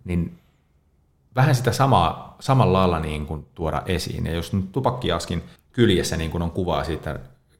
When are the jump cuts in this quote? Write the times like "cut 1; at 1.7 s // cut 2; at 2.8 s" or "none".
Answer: cut 1; at 5.6 s